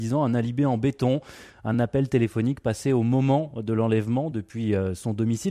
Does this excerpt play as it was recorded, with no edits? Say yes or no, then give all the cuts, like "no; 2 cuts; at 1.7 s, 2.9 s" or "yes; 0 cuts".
yes; 0 cuts